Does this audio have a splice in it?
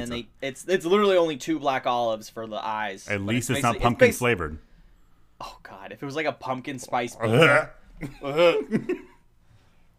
no; 0 cuts

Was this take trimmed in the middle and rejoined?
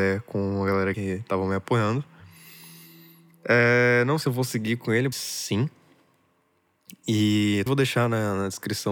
yes; 4 cuts; at 0.9 s, 4.2 s, 5.1 s, 7.7 s

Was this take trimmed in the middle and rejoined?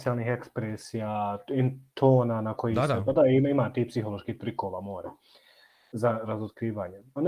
no; 0 cuts

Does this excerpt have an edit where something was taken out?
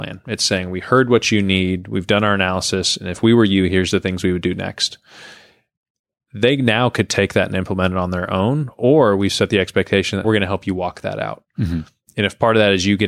yes; 1 cut; at 10.2 s

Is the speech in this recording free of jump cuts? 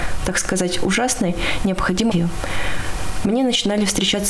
no; 1 cut; at 2.1 s

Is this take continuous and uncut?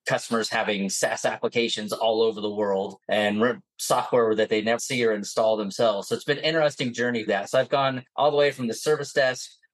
no; 4 cuts; at 3.0 s, 4.8 s, 7.3 s, 8.1 s

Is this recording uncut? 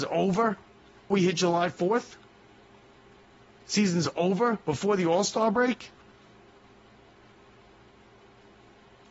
no; 2 cuts; at 1.1 s, 4.6 s

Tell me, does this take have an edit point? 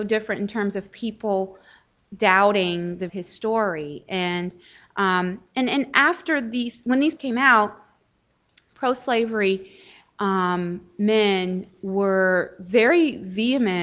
yes; 2 cuts; at 3.1 s, 7.2 s

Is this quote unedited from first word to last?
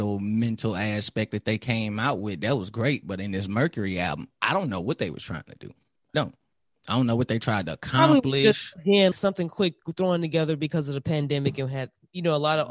no; 2 cuts; at 6.1 s, 9.1 s

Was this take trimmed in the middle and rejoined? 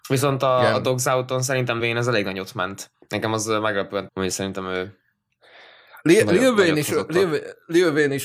yes; 2 cuts; at 1.8 s, 4.1 s

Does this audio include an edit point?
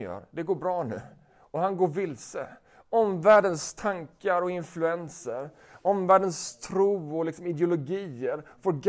no; 0 cuts

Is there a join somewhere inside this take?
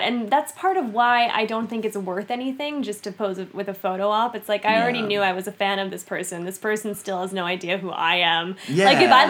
no; 0 cuts

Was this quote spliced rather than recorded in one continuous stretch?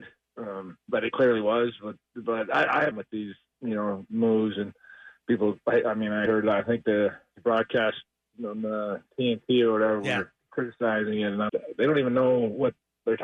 yes; 3 cuts; at 2.9 s, 6.3 s, 11.5 s

